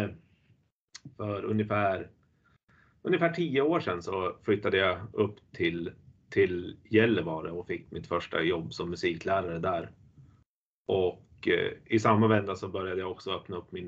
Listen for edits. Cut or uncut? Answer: uncut